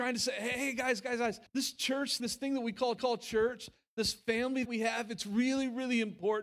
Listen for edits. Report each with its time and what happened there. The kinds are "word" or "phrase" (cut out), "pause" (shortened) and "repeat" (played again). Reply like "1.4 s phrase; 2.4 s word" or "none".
1.5 s pause; 2.2 s word; 3.0 s repeat; 4.6 s word